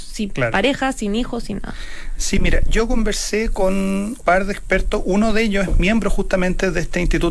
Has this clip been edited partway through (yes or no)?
yes